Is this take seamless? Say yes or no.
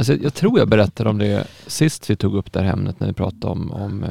yes